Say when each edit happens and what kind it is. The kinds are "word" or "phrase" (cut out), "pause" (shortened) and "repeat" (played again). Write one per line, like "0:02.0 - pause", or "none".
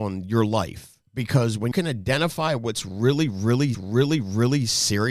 0:01.1 - pause
0:01.7 - word
0:03.7 - repeat